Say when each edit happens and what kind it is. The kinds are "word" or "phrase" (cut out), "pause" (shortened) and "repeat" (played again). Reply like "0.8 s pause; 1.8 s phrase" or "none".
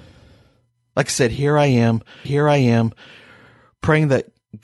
2.3 s repeat